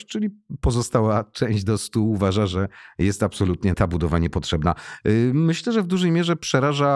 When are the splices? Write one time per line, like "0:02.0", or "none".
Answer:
0:03.7